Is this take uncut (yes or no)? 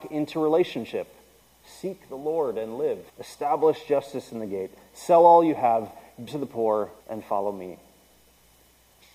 no